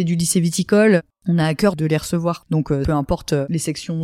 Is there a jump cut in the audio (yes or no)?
no